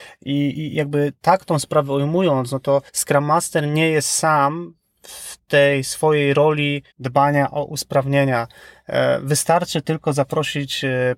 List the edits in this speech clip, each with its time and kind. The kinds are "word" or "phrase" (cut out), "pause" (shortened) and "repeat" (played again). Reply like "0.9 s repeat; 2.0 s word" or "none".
2.9 s pause; 6.9 s pause